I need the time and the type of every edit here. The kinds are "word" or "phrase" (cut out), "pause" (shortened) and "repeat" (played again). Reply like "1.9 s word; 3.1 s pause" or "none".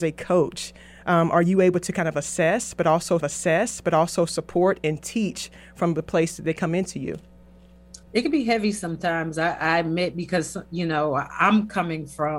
3.2 s repeat; 8.0 s pause